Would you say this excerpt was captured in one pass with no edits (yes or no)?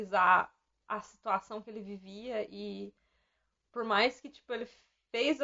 yes